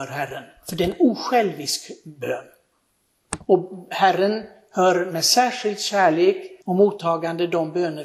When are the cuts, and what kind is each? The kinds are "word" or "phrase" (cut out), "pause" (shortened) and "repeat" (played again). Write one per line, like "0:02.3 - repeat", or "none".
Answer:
0:06.6 - pause